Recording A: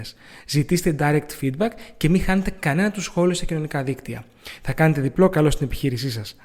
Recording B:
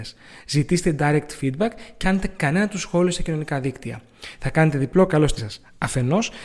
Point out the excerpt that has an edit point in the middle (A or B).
B